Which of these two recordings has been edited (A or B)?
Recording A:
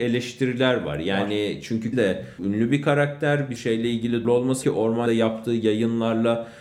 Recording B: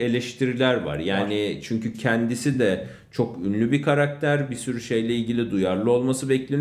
A